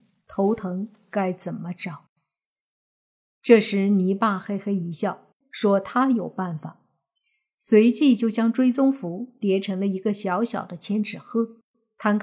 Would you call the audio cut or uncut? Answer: uncut